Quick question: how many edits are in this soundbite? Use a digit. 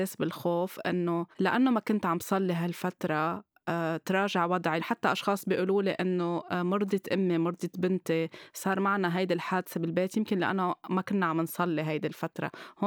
2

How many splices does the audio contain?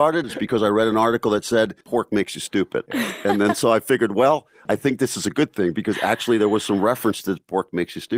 1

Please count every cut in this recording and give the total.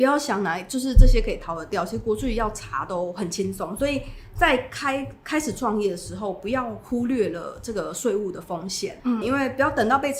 1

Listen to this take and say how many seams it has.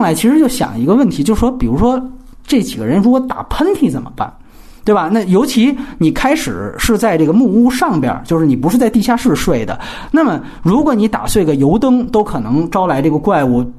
0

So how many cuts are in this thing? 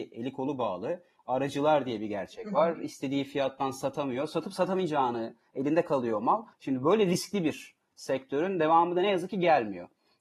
1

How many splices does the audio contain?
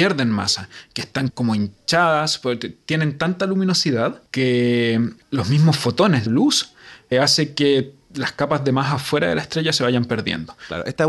3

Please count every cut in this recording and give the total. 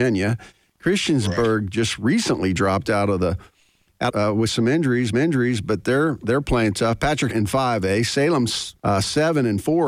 4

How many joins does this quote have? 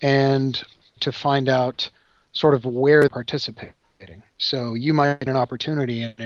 3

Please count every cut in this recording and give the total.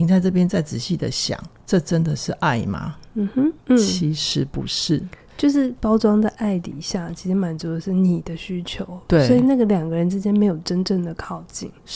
1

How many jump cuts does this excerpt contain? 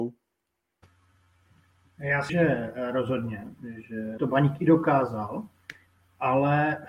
2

